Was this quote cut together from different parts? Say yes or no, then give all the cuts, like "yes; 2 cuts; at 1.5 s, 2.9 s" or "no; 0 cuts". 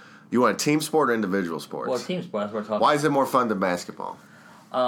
no; 0 cuts